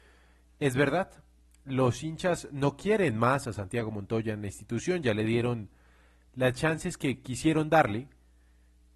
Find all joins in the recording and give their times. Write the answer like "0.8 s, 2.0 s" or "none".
none